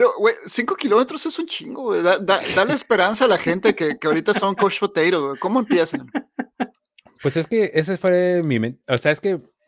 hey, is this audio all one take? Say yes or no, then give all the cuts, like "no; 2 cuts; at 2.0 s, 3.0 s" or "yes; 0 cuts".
yes; 0 cuts